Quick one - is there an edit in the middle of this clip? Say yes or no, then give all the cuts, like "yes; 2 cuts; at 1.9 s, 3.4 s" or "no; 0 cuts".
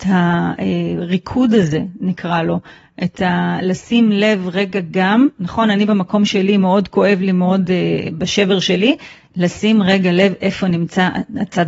no; 0 cuts